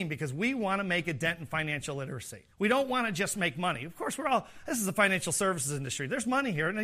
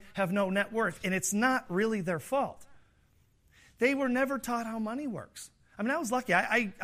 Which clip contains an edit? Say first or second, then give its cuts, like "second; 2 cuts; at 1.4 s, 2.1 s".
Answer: first; 1 cut; at 2.5 s